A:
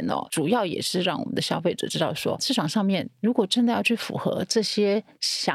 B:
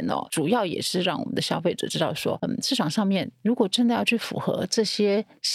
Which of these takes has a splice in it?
A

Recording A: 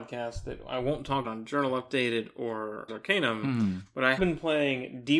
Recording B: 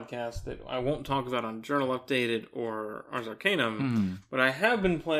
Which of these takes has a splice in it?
A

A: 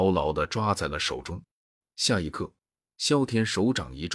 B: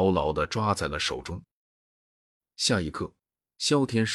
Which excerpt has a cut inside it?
A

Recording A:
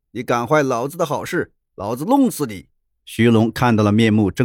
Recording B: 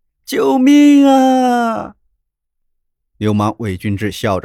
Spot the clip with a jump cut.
A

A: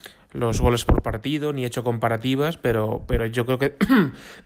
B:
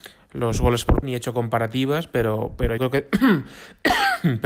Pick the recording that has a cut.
B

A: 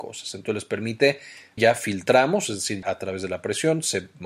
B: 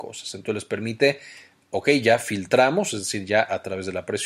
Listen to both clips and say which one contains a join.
A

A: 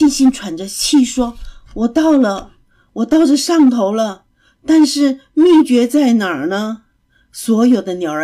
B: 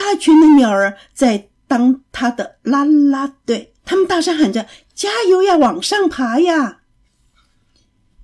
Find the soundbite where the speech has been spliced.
B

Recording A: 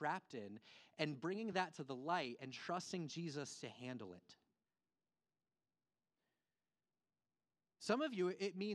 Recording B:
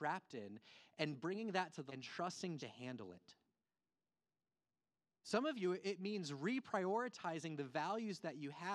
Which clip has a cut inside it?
B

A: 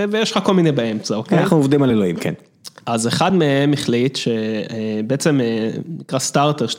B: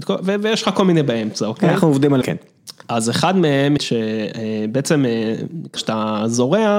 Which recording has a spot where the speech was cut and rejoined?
B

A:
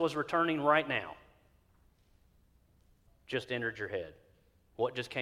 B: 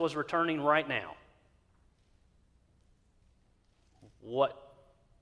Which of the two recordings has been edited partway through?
A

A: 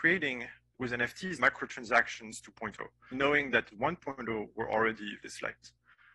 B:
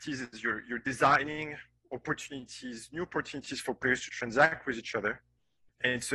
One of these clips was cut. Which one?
A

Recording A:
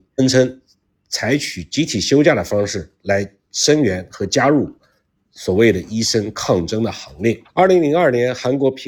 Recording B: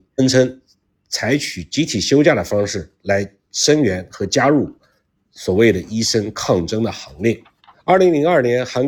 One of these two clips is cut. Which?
A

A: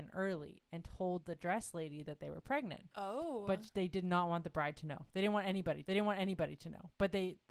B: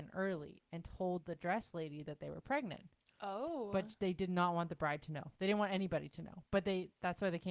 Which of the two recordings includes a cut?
A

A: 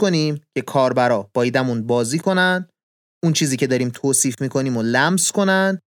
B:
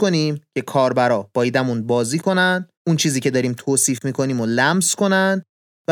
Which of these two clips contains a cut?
B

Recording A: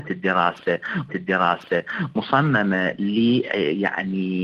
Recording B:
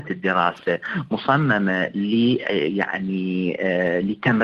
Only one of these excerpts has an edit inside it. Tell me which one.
A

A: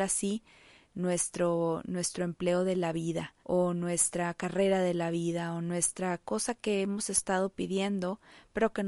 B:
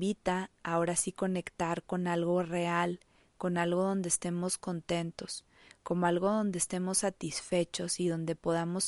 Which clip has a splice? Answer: A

